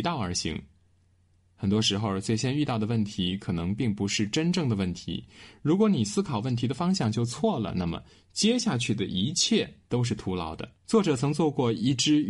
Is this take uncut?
no; 2 cuts; at 9.8 s, 10.7 s

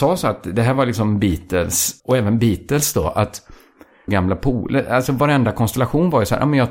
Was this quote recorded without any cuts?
no; 2 cuts; at 2.0 s, 4.1 s

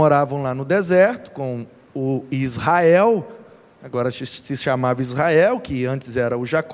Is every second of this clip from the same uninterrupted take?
yes; 0 cuts

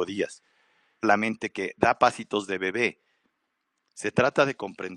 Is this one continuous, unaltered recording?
no; 1 cut; at 1.0 s

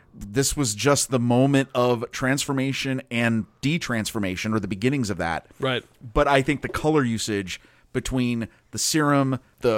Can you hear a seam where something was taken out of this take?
no; 0 cuts

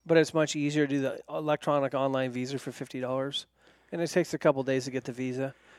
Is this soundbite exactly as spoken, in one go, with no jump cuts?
yes; 0 cuts

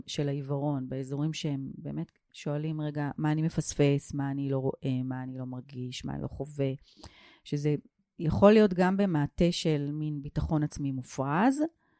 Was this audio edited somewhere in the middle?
no; 0 cuts

